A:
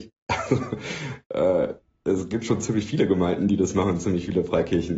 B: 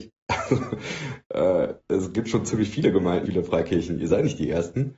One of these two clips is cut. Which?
B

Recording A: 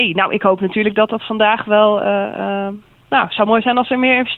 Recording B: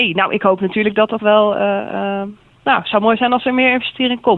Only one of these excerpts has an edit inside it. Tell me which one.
B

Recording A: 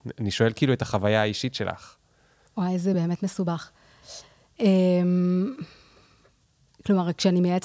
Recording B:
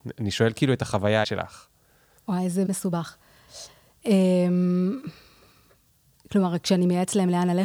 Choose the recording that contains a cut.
B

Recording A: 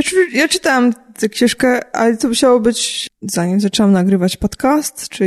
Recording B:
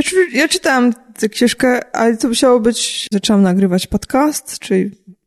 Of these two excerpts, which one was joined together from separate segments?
B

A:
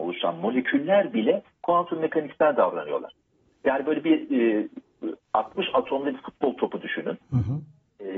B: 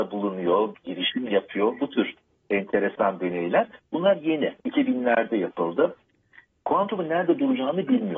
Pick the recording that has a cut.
B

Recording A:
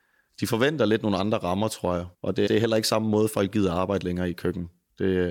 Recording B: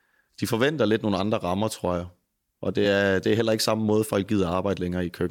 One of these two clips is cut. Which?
A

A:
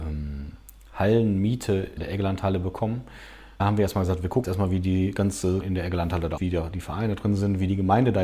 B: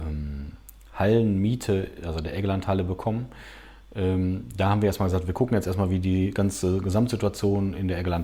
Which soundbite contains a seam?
A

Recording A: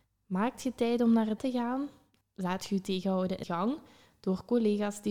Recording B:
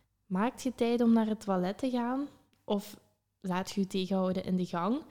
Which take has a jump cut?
A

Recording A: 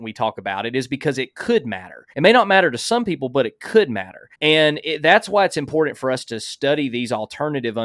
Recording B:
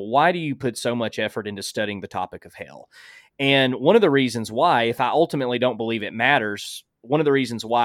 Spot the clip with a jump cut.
A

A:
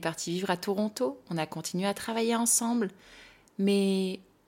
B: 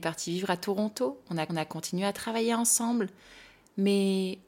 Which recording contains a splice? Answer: B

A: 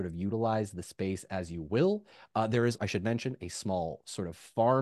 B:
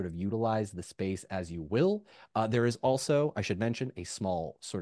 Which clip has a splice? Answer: A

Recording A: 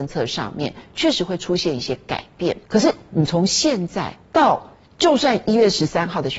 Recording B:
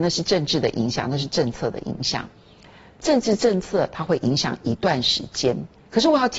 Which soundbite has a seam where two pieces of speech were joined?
A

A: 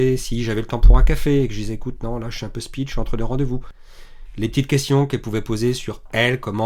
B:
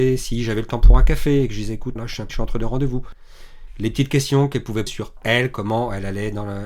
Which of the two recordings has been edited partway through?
B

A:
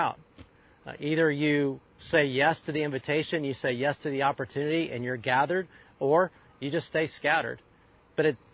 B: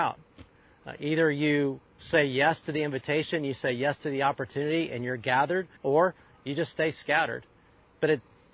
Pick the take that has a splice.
B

